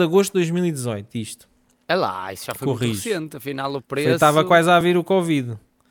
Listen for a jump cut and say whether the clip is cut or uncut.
uncut